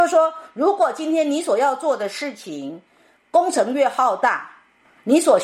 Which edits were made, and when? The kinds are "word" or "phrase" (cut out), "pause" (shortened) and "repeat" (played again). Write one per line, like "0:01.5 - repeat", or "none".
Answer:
none